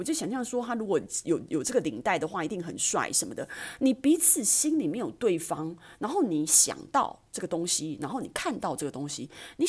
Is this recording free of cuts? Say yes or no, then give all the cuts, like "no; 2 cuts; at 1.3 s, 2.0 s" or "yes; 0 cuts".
yes; 0 cuts